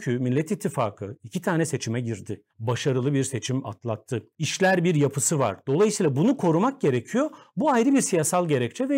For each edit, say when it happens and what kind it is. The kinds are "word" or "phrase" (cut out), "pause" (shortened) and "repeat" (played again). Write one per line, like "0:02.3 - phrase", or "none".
0:02.5 - pause
0:04.3 - pause